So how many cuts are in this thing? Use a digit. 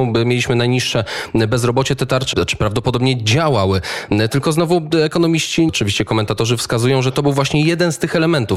2